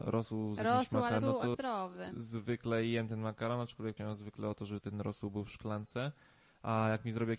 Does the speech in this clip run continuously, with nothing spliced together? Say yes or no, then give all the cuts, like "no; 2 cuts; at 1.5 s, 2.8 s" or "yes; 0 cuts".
no; 3 cuts; at 1.2 s, 1.5 s, 4.0 s